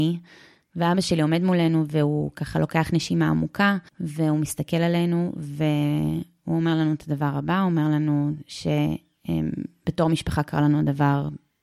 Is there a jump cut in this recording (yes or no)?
yes